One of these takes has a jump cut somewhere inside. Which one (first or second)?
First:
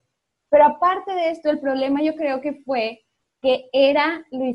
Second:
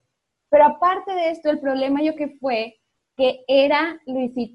second